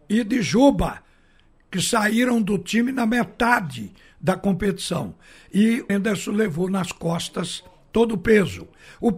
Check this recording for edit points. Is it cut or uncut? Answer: cut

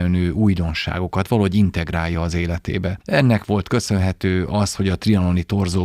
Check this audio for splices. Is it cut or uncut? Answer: uncut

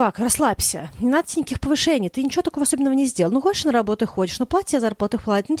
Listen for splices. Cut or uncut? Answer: uncut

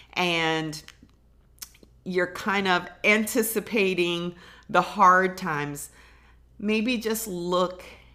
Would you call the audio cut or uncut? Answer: uncut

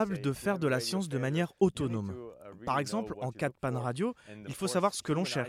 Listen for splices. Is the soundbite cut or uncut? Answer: uncut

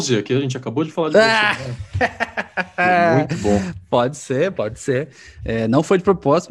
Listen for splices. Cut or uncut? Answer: uncut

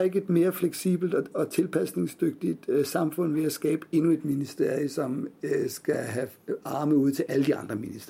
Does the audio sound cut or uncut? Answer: uncut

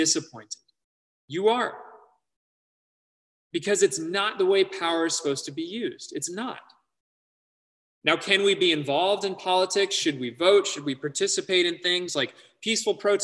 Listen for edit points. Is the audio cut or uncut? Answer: uncut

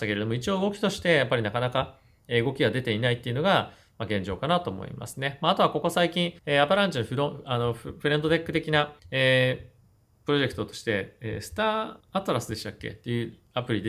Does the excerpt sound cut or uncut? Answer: cut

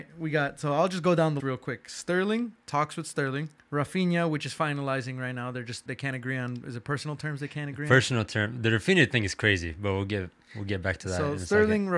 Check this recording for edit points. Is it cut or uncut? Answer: cut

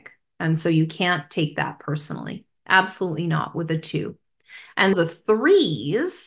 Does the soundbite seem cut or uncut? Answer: cut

